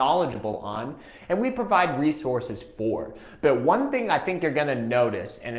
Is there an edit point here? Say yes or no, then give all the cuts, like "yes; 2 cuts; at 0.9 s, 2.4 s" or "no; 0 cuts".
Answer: no; 0 cuts